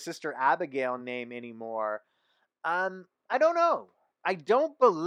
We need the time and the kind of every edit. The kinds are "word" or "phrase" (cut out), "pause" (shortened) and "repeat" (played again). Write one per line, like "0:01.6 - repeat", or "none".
none